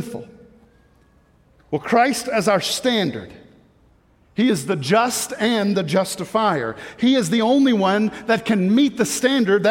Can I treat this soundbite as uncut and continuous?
yes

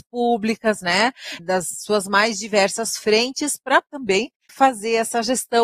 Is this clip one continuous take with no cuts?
no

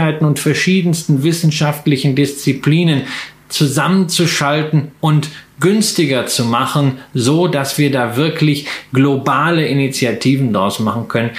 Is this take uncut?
yes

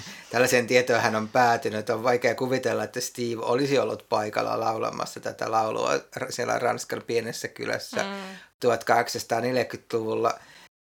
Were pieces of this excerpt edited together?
no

